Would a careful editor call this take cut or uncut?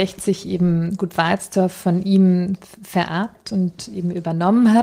uncut